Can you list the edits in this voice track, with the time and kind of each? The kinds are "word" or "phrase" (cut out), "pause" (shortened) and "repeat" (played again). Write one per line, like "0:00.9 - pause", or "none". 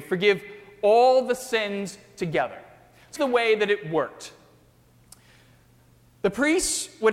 0:03.2 - word